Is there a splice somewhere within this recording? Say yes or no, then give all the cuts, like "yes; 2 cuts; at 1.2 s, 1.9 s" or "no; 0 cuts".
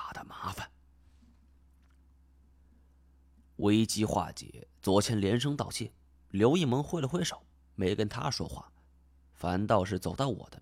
no; 0 cuts